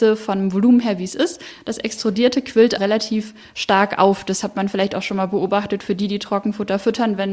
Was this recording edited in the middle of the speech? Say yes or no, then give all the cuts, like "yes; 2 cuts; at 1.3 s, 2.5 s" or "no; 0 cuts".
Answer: yes; 1 cut; at 2.8 s